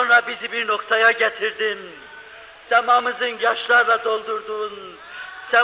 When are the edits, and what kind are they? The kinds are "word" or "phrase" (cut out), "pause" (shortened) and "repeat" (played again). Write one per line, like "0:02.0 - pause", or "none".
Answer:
0:03.4 - word